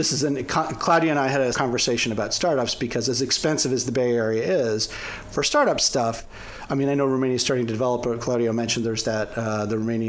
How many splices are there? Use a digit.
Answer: 1